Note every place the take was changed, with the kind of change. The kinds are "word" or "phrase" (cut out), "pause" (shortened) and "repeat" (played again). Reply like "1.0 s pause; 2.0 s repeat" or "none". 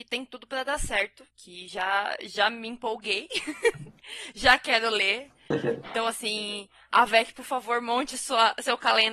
1.3 s pause